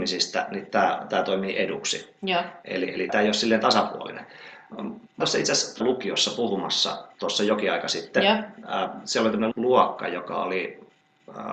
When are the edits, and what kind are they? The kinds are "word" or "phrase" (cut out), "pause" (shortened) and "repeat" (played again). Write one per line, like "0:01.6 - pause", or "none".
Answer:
0:03.1 - word
0:05.2 - word
0:05.8 - word
0:09.5 - word